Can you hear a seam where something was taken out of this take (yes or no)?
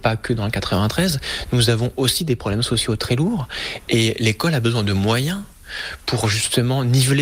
no